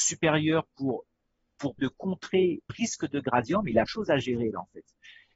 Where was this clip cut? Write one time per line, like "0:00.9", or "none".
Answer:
0:01.8
0:02.7
0:03.9